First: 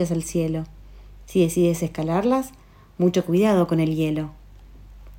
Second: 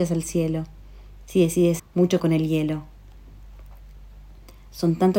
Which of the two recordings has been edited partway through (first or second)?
second